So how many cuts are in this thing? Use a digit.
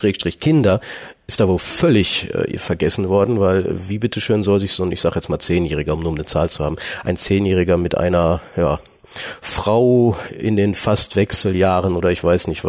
0